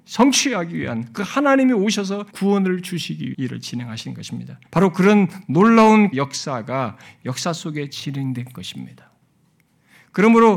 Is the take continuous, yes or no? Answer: no